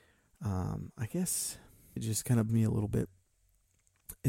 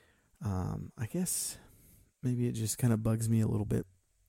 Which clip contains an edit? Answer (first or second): first